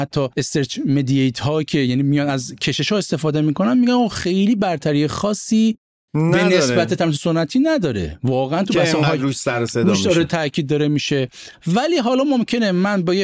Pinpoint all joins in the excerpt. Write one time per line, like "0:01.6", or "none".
none